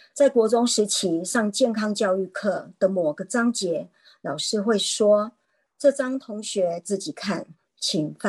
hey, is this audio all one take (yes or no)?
yes